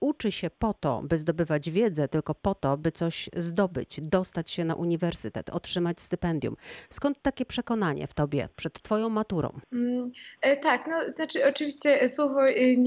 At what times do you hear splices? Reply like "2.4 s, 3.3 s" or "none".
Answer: 9.6 s